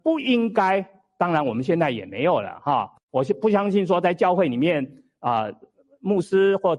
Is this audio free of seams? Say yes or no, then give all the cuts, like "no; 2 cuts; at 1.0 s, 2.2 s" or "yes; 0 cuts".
yes; 0 cuts